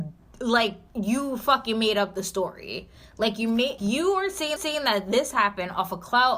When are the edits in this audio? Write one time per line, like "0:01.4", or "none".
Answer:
0:03.8
0:04.6